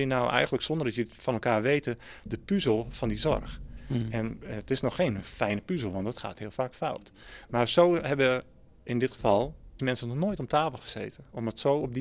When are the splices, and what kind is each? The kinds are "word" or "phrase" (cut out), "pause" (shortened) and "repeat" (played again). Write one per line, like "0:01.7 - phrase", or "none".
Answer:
0:09.8 - word